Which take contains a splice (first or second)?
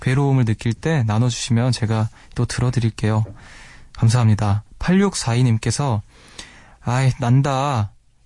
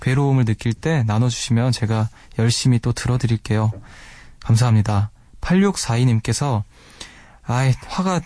first